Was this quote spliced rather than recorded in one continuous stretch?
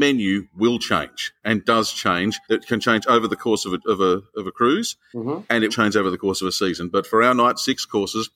yes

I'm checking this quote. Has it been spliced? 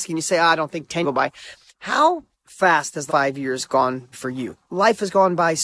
yes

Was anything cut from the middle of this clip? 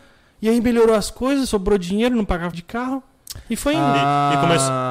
yes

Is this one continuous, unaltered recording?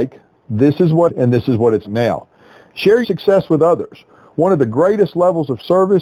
no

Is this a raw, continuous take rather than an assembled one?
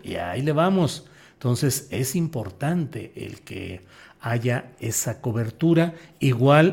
yes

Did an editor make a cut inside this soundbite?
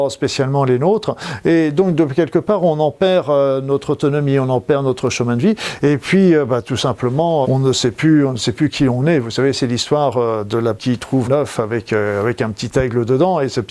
yes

